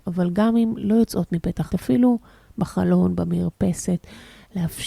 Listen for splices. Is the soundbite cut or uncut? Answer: cut